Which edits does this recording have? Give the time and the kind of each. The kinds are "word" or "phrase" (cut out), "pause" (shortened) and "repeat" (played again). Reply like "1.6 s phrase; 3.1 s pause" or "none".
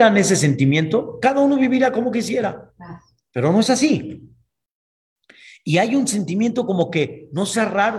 none